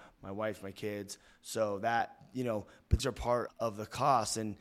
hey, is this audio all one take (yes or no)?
no